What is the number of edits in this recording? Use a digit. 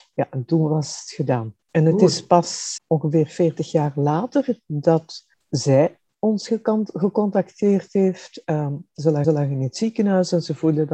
4